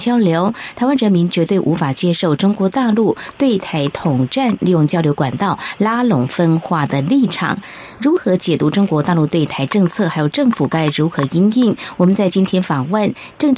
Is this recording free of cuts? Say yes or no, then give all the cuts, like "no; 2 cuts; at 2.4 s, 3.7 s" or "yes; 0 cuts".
yes; 0 cuts